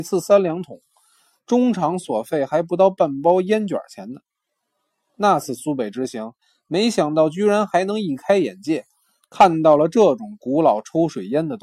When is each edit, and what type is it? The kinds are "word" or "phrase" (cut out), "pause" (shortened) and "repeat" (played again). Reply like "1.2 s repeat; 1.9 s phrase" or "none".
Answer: none